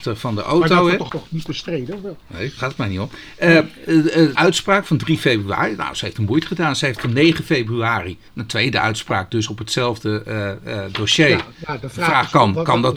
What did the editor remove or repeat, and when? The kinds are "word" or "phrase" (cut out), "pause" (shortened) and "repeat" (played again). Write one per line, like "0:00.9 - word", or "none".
0:01.1 - phrase
0:02.6 - word
0:04.4 - word
0:07.0 - phrase
0:08.3 - pause
0:11.5 - pause